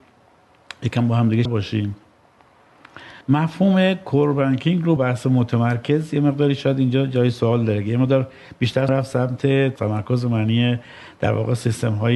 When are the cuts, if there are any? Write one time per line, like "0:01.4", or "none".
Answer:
0:01.5
0:03.2
0:05.0
0:08.9
0:09.8